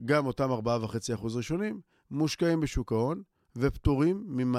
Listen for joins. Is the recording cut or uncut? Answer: uncut